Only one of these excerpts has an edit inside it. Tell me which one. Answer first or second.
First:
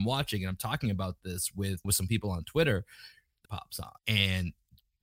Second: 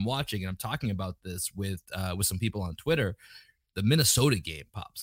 first